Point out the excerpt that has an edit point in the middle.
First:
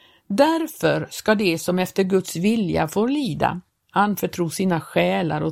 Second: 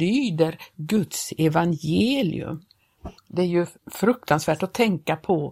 second; 2 cuts; at 3.2 s, 3.8 s

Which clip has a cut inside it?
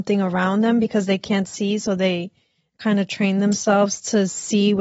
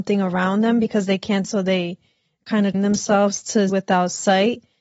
second; 3 cuts; at 1.4 s, 2.7 s, 3.7 s

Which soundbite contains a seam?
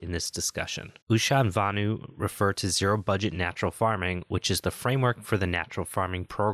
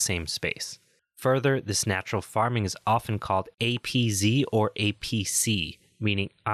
first; 1 cut; at 1.0 s

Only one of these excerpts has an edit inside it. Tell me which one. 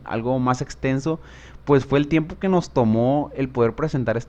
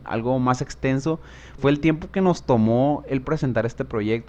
second; 2 cuts; at 1.6 s, 3.2 s

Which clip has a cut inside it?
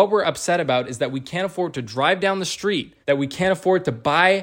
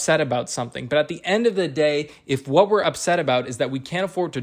first; 1 cut; at 3.0 s

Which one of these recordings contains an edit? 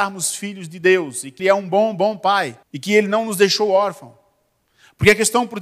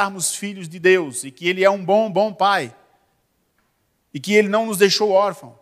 first; 2 cuts; at 1.4 s, 2.6 s

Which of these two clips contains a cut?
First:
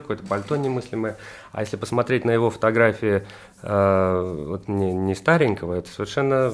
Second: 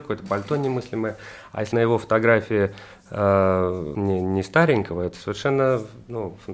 second; 2 cuts; at 1.7 s, 3.9 s

